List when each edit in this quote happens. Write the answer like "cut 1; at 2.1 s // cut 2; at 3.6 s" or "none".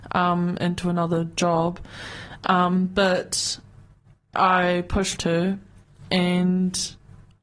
cut 1; at 4.3 s // cut 2; at 5.2 s